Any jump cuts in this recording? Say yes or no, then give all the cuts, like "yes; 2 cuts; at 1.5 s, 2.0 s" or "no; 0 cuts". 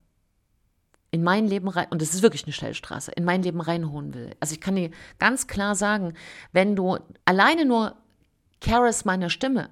yes; 1 cut; at 7.2 s